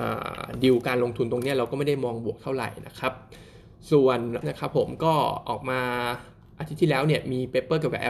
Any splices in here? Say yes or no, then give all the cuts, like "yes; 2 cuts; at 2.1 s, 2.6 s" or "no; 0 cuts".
yes; 1 cut; at 4.4 s